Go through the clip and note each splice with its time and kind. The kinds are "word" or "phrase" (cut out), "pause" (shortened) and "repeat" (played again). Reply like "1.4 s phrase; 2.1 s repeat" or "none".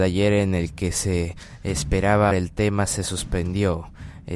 2.3 s word

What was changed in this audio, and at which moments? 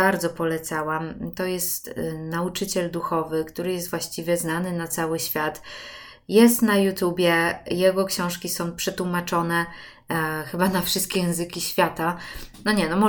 none

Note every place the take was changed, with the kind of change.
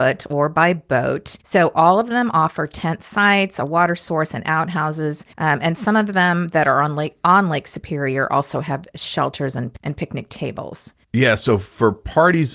1.4 s pause; 5.3 s pause; 11.0 s pause

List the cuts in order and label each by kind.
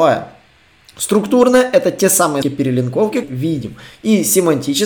2.4 s word; 3.2 s phrase

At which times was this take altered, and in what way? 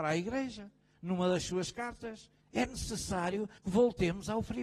2.4 s pause; 3.6 s pause

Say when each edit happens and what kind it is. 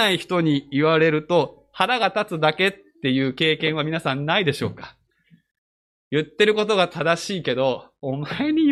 none

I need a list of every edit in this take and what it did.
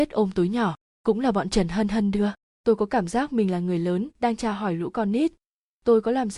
none

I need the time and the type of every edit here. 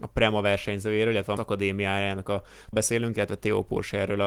1.4 s word; 2.7 s word

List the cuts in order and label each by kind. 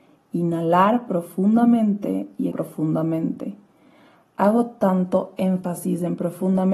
2.5 s word

